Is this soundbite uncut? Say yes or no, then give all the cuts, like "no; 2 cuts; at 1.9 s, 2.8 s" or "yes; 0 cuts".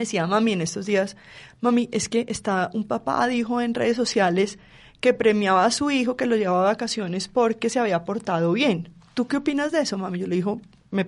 yes; 0 cuts